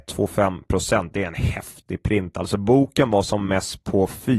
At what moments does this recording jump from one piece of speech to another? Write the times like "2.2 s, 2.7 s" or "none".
none